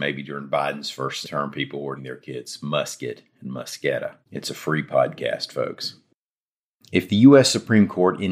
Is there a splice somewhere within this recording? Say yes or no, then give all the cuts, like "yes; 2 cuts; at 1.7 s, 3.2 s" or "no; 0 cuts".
yes; 3 cuts; at 1.2 s, 2.0 s, 4.2 s